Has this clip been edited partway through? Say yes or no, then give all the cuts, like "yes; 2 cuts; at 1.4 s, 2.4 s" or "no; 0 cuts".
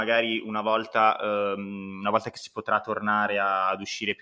no; 0 cuts